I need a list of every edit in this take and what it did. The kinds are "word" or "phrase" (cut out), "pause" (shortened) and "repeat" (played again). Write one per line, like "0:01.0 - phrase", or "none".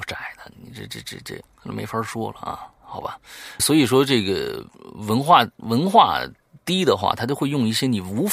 0:01.5 - word
0:03.6 - word